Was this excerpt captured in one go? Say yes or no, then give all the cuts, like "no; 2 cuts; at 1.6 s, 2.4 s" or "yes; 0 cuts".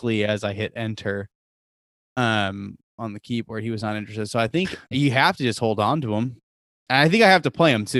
yes; 0 cuts